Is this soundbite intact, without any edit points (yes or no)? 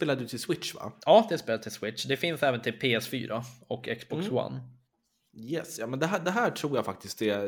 yes